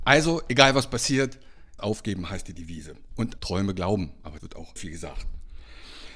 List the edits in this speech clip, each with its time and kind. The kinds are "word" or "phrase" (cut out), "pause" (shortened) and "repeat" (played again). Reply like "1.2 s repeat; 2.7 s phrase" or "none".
1.8 s word; 3.4 s phrase; 4.4 s word; 4.8 s word